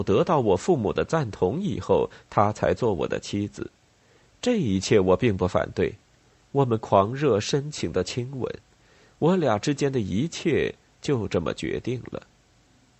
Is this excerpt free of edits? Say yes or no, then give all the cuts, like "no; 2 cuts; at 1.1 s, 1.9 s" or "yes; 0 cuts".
yes; 0 cuts